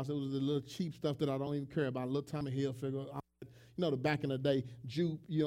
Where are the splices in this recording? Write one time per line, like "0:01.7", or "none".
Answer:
none